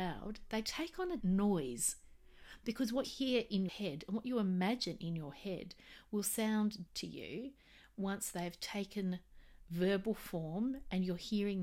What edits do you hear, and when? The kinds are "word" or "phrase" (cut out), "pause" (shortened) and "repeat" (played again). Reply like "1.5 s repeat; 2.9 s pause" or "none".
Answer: 1.2 s word; 3.0 s word; 3.7 s word; 6.9 s word